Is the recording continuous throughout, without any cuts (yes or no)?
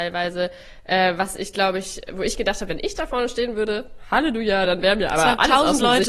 yes